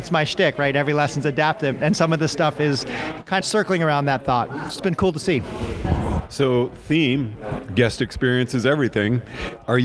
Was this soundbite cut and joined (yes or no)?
yes